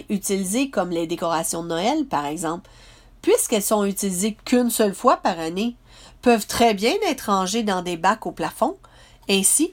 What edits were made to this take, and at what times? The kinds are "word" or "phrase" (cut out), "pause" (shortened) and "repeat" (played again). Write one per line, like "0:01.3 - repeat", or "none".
none